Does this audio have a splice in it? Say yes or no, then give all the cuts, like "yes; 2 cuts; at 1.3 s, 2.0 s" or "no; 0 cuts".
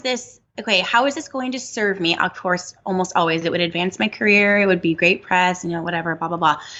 no; 0 cuts